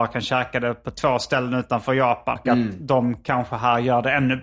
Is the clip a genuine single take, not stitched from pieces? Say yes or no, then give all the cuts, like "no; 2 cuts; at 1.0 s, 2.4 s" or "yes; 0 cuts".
no; 1 cut; at 2.4 s